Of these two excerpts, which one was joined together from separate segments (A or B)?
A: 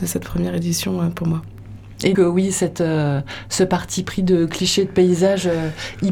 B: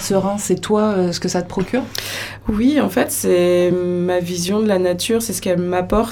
A